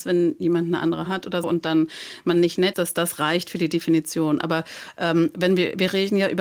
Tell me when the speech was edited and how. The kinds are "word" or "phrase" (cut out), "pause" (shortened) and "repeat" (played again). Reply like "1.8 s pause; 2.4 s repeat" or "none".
1.1 s word; 1.4 s word; 2.7 s word